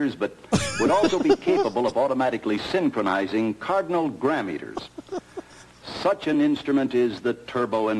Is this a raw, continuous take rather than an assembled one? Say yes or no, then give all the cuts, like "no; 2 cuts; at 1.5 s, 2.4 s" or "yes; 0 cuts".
yes; 0 cuts